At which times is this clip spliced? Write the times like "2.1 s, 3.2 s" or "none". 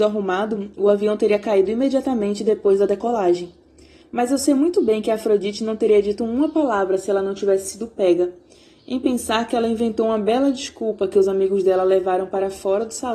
none